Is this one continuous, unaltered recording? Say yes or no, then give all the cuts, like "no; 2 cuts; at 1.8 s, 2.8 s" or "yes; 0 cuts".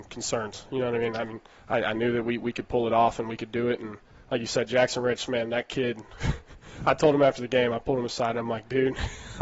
no; 1 cut; at 1.5 s